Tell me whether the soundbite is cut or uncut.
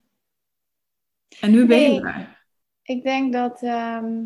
uncut